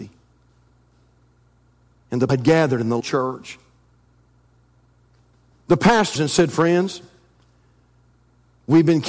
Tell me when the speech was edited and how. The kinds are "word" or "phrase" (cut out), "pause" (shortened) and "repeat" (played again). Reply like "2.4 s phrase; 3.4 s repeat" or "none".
2.3 s word; 3.0 s word; 6.2 s word

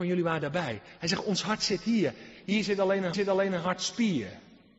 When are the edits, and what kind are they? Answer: 3.1 s repeat

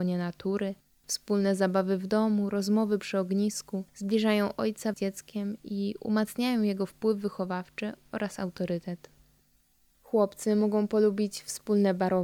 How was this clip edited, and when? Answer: 3.9 s pause; 4.9 s phrase

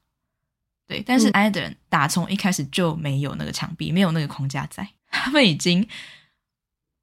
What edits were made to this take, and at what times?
1.3 s word; 5.0 s pause

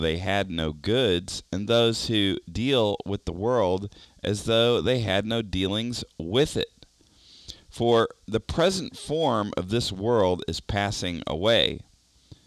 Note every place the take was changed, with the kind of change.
4.0 s pause

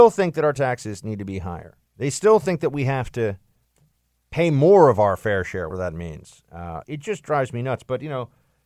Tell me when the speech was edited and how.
1.9 s pause; 3.6 s pause; 5.7 s word; 6.8 s phrase

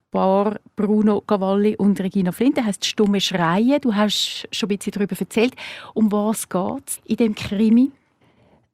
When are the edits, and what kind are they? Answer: none

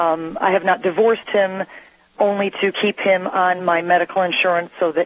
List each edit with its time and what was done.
none

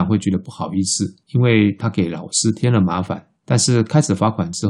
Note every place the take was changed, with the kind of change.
1.2 s pause; 3.4 s pause

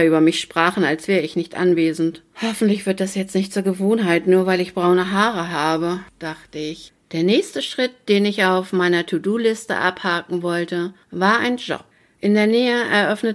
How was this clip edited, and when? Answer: none

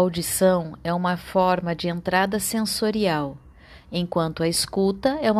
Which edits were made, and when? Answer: none

